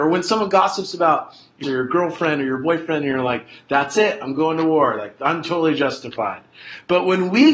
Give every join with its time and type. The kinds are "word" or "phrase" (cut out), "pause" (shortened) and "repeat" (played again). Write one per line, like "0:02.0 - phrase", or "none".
0:01.6 - word